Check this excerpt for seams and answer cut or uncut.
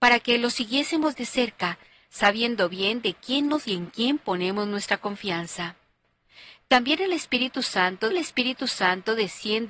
cut